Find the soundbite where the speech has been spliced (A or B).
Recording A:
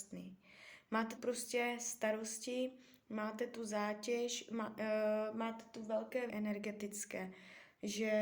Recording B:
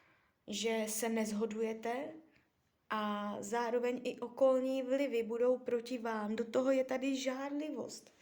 A